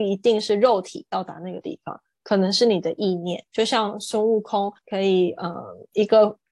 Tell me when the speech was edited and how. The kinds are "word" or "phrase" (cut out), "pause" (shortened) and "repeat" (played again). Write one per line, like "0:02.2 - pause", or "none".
0:03.5 - pause
0:04.8 - pause